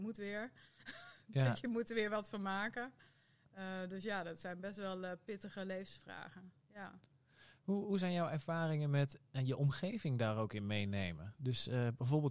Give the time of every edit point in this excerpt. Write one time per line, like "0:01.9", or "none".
none

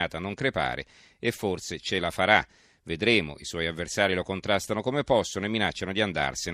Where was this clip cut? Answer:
none

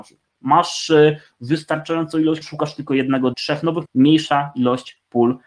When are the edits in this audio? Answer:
0:02.4
0:03.3
0:03.9

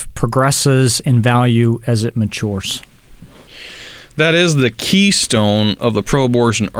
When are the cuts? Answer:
none

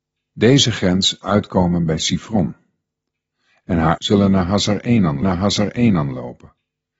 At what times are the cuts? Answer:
0:01.2
0:04.0
0:05.2

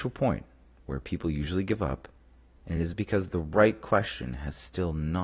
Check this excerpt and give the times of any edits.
none

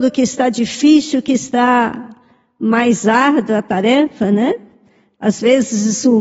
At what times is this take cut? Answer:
none

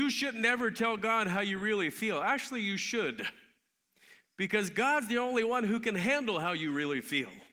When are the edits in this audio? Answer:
none

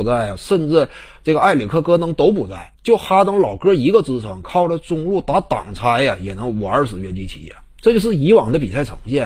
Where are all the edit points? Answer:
0:02.7

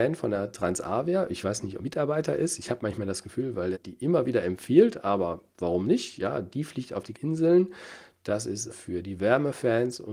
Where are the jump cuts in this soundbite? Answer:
0:01.8
0:03.7
0:07.1
0:08.7

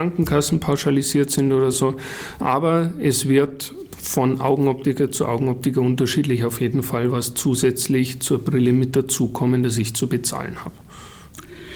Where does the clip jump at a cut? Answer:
none

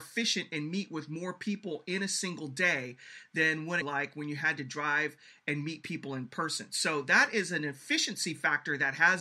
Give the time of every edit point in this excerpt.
0:03.8

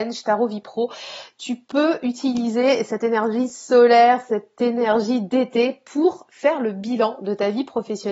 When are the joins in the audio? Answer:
none

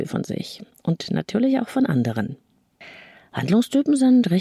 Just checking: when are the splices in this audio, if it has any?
none

